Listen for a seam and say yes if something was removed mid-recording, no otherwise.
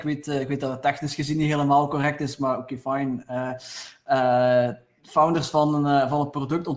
no